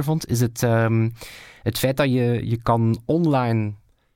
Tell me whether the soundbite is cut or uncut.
uncut